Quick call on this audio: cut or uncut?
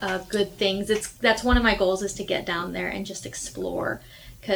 uncut